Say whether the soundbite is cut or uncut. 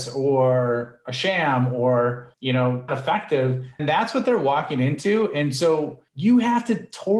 cut